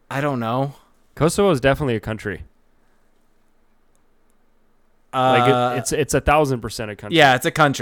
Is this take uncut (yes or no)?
yes